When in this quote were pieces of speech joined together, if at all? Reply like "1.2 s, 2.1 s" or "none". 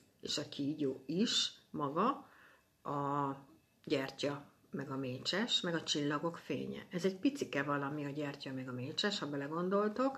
none